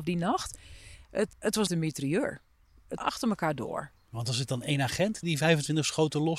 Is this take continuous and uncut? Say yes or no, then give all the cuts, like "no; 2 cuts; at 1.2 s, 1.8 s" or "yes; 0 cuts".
no; 4 cuts; at 1.3 s, 1.7 s, 3.0 s, 5.2 s